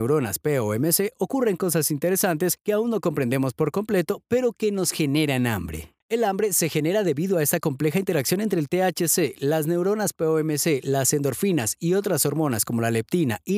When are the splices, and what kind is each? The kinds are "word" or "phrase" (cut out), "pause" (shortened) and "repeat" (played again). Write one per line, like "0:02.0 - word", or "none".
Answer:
none